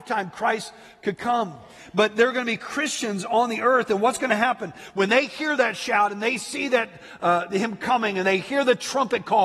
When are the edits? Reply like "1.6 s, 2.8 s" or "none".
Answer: none